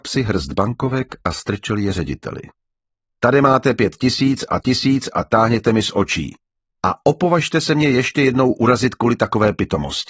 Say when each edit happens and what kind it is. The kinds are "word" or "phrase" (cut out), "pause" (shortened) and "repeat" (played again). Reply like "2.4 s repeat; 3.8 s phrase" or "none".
4.6 s repeat